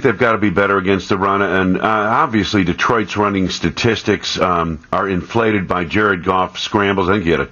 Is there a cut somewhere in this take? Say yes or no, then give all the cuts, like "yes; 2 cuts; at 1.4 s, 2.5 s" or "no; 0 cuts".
no; 0 cuts